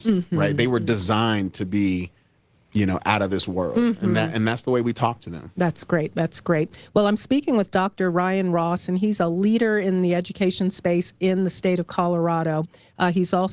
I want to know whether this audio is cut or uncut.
uncut